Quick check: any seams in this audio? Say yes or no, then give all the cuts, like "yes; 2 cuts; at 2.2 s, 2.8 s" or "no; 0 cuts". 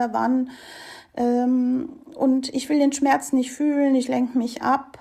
no; 0 cuts